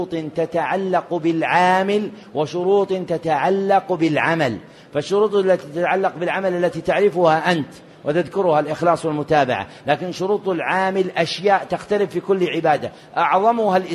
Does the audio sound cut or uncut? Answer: uncut